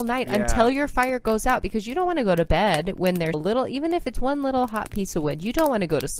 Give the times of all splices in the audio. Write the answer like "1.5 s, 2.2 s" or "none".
3.3 s, 4.1 s